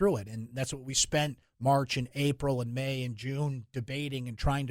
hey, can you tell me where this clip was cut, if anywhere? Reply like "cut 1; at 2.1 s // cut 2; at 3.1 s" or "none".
none